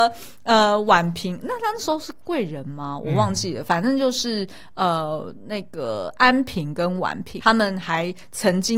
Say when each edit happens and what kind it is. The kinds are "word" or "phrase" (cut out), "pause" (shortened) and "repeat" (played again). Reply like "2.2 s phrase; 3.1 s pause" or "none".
7.4 s word

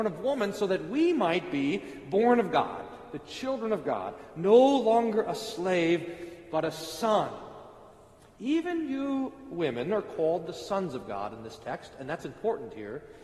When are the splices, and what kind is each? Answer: none

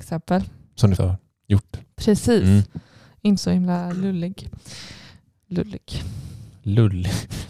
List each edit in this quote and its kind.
1.0 s word; 3.4 s word

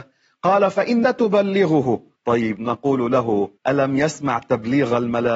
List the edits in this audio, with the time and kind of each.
1.0 s word; 2.2 s pause; 3.6 s pause

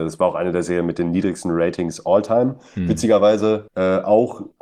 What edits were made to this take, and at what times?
none

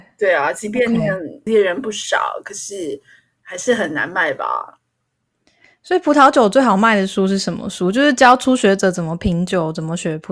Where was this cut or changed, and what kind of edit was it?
1.5 s word

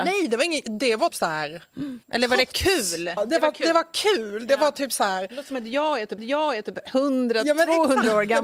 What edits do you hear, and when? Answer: 1.1 s word; 2.0 s pause; 3.2 s word; 6.2 s repeat

